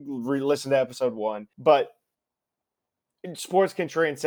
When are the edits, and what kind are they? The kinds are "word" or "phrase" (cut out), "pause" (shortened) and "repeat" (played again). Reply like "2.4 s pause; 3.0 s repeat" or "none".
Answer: 1.5 s word